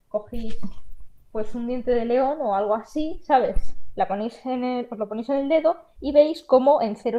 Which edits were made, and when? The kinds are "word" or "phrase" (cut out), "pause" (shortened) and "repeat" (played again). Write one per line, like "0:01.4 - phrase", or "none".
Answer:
none